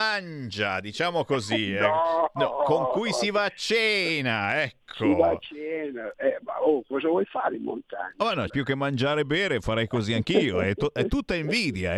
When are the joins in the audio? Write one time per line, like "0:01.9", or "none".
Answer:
0:08.5

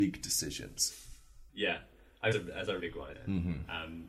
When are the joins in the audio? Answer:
0:01.5
0:02.3
0:02.8
0:03.1

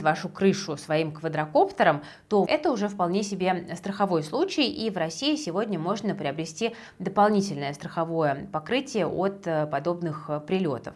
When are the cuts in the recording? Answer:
0:02.4

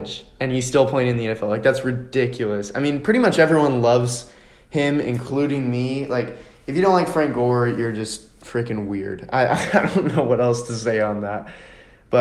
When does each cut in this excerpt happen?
none

